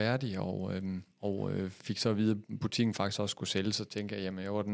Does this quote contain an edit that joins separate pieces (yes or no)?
yes